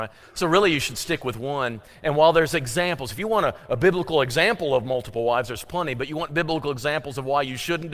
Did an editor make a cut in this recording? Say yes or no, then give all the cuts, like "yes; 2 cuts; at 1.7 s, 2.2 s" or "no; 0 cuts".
no; 0 cuts